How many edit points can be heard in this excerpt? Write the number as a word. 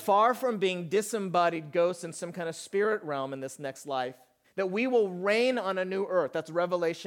one